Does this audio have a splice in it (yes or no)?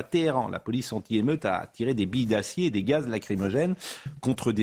no